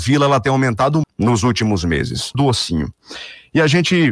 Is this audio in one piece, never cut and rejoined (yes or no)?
no